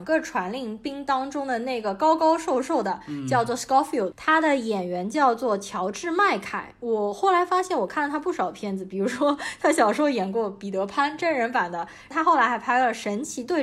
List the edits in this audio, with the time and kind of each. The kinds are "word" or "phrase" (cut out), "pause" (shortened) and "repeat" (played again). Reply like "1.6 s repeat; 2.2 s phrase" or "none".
4.1 s word